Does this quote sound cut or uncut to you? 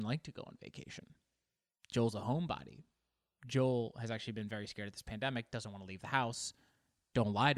uncut